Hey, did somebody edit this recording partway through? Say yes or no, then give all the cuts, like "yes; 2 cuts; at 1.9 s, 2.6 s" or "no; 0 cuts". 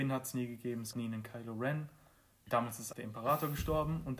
yes; 2 cuts; at 0.9 s, 2.9 s